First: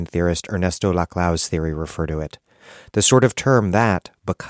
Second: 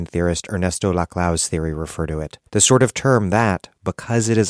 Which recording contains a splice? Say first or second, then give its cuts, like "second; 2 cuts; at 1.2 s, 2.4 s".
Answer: second; 1 cut; at 2.5 s